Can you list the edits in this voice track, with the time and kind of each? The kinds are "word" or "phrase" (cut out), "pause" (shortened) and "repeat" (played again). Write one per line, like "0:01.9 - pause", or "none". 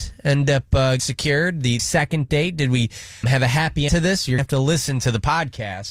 0:01.0 - word
0:01.8 - word
0:03.2 - word
0:03.9 - word
0:04.4 - word